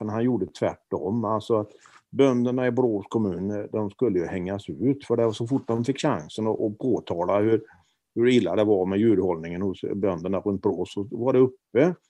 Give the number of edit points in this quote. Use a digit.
1